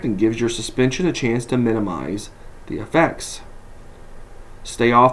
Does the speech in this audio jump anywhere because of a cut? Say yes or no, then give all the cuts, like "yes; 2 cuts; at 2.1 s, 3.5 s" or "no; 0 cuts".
no; 0 cuts